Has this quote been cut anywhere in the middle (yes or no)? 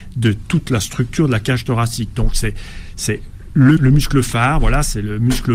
yes